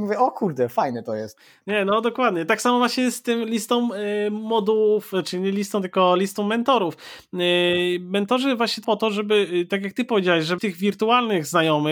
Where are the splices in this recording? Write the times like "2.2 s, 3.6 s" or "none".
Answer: 8.8 s, 10.6 s